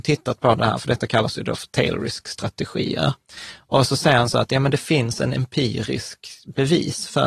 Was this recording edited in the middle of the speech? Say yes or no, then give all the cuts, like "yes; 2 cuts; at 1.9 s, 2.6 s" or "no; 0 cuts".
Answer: no; 0 cuts